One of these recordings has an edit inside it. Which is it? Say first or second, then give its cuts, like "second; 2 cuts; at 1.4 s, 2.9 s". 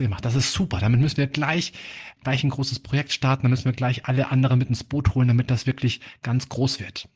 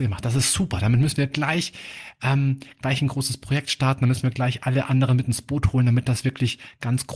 first; 1 cut; at 2.2 s